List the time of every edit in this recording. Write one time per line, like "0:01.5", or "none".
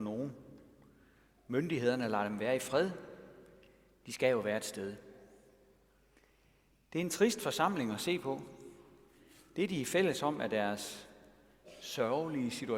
none